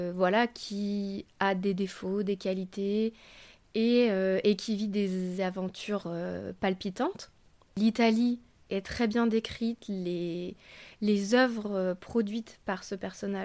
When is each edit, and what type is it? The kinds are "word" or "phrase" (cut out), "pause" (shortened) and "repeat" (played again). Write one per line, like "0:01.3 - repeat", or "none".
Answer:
none